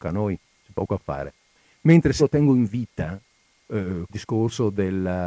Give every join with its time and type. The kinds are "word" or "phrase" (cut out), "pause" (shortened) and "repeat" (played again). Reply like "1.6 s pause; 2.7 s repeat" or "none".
2.2 s word; 4.1 s word